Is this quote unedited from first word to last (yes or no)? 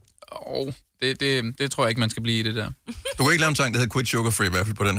no